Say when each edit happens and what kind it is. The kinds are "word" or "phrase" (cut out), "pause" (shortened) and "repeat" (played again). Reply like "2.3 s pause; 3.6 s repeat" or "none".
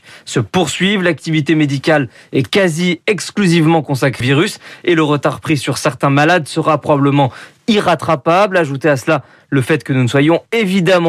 4.2 s word